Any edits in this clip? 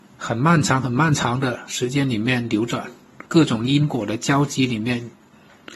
yes; 1 cut; at 3.3 s

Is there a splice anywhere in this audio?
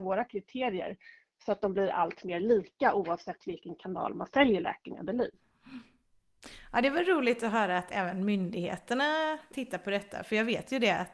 no; 0 cuts

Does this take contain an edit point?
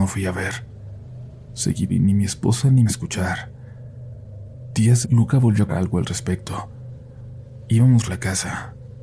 yes; 5 cuts; at 1.9 s, 2.9 s, 5.0 s, 5.7 s, 8.1 s

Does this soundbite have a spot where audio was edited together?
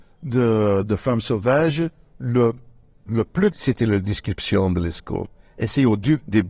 yes; 2 cuts; at 3.1 s, 3.5 s

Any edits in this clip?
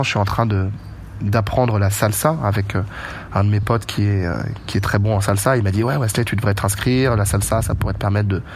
no; 0 cuts

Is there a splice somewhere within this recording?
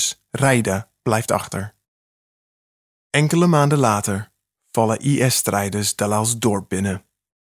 no; 0 cuts

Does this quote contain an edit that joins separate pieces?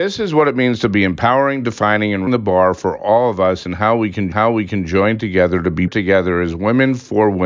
yes; 3 cuts; at 2.3 s, 4.3 s, 5.9 s

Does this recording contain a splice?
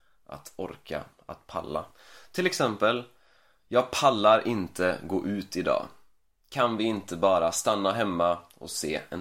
no; 0 cuts

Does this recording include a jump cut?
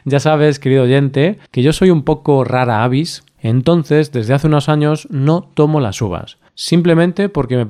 yes; 2 cuts; at 1.5 s, 6.5 s

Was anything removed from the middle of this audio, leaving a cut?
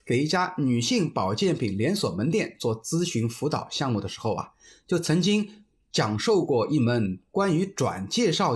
no; 0 cuts

